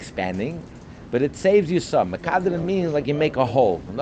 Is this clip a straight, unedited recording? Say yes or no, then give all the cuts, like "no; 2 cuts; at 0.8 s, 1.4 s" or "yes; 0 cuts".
yes; 0 cuts